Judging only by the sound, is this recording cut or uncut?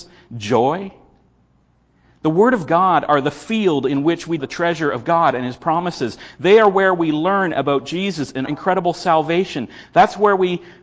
cut